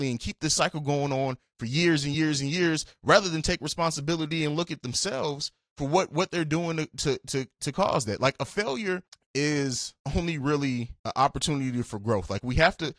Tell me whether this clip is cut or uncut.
uncut